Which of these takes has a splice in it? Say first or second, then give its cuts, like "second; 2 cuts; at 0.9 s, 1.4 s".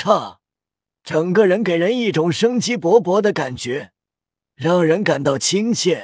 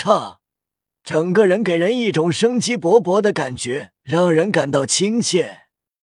second; 1 cut; at 4.0 s